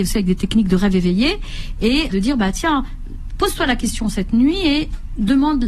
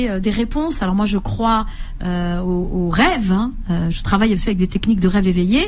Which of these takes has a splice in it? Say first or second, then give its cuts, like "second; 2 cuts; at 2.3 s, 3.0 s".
first; 1 cut; at 2.1 s